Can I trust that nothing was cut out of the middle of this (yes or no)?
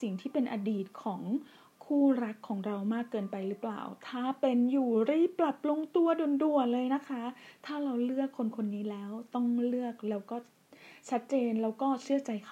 yes